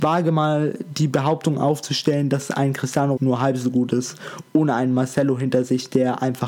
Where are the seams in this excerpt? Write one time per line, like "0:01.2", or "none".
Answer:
0:03.2